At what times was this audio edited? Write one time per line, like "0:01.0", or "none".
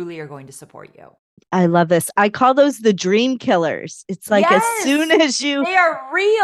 none